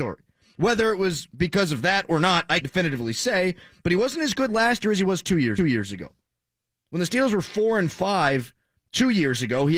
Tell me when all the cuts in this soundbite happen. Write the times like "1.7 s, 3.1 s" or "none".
2.6 s, 5.6 s